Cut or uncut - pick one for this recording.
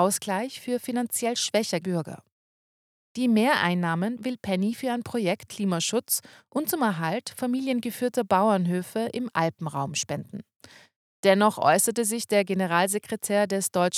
cut